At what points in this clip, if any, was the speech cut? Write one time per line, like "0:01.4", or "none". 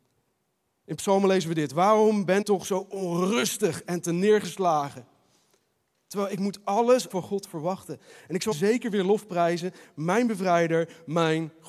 0:02.4
0:07.1
0:08.5